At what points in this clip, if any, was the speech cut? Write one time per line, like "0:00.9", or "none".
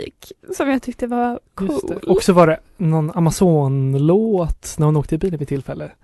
0:01.5